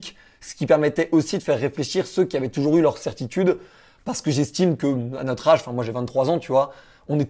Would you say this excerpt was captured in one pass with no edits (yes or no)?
yes